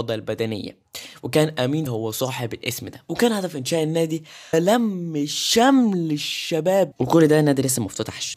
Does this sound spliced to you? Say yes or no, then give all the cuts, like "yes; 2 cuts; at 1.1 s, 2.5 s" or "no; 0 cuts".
yes; 3 cuts; at 1.9 s, 4.5 s, 6.9 s